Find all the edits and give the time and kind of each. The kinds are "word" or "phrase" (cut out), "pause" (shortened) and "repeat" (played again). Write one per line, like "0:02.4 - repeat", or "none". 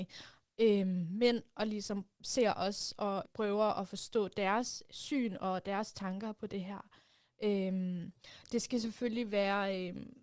0:03.3 - word